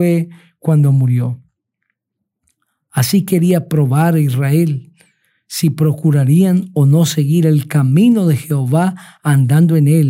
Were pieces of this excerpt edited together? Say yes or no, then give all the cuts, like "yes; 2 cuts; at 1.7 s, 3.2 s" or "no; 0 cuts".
no; 0 cuts